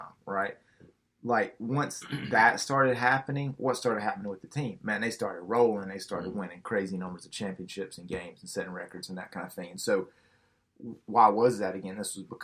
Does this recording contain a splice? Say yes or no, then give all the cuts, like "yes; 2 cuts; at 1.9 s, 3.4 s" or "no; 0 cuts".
no; 0 cuts